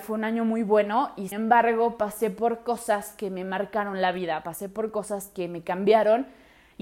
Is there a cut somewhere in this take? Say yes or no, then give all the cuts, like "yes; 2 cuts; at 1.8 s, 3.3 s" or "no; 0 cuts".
yes; 1 cut; at 1.3 s